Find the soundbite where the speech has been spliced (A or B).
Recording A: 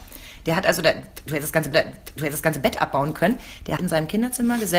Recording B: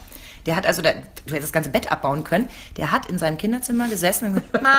A